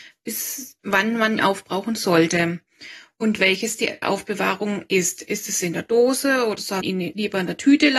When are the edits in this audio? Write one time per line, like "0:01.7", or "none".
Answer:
0:01.4
0:04.0
0:06.8